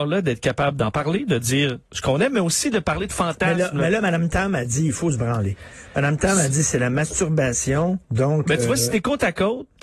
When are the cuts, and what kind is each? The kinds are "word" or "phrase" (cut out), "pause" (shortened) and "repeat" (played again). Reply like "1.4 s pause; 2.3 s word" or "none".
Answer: 8.0 s pause

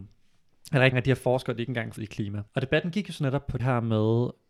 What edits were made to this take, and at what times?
0.9 s word; 2.0 s word; 2.5 s pause; 3.6 s word

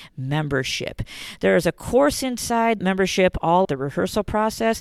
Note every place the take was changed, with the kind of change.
2.8 s word; 3.6 s word

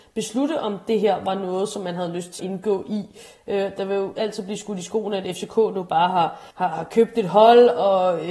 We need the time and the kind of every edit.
2.4 s word; 6.5 s pause

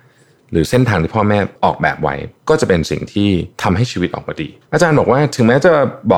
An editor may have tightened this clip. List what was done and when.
1.6 s pause; 2.4 s pause; 4.6 s pause

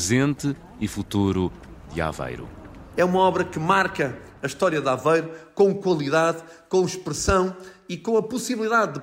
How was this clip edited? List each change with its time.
none

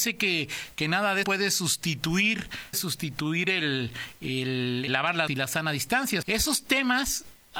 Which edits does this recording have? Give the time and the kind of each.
1.2 s word; 2.7 s word; 4.9 s word; 5.3 s word; 6.2 s word

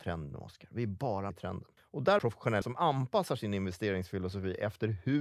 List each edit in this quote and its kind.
1.3 s word; 1.8 s pause; 2.2 s phrase; 2.6 s word

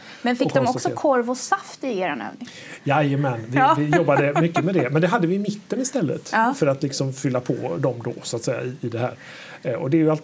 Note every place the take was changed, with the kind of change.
none

